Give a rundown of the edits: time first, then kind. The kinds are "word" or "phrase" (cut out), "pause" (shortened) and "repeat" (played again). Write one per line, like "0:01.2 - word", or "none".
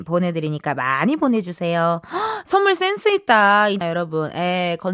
0:03.8 - phrase